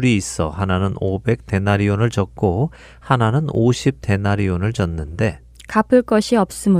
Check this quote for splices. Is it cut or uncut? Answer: uncut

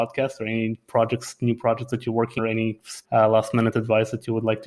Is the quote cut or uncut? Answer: cut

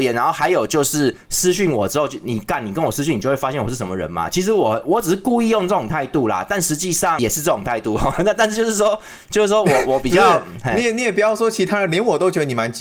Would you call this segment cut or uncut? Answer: cut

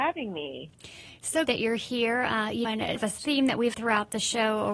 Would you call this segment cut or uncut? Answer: cut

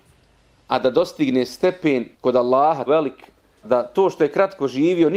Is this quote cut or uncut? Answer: cut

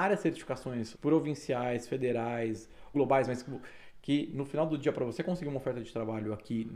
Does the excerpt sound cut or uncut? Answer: cut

